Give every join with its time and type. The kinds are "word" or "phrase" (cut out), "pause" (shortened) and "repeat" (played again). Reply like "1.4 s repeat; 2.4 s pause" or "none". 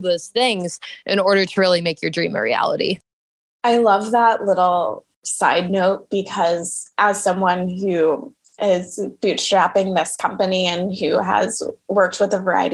none